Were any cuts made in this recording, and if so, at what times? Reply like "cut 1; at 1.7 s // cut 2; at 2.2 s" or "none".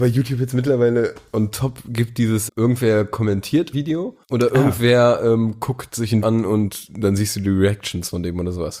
cut 1; at 2.5 s // cut 2; at 3.7 s // cut 3; at 4.2 s // cut 4; at 6.2 s